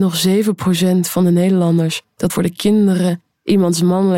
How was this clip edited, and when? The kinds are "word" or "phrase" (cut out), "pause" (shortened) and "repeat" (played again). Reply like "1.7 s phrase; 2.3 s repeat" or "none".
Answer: 2.3 s word